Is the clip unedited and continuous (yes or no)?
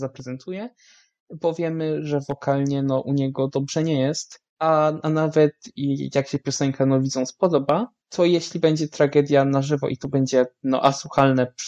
no